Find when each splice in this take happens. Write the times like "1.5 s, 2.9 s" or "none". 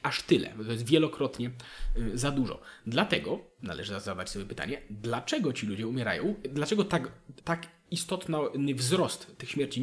7.4 s